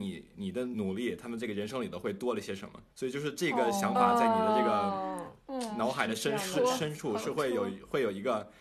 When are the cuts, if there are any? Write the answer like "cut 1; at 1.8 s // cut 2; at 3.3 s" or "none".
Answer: cut 1; at 2.9 s